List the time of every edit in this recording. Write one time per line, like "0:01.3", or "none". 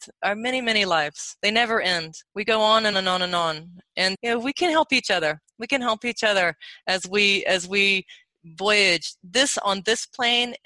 0:02.3
0:02.9
0:04.1